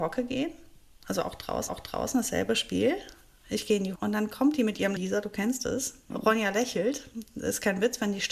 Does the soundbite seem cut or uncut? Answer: cut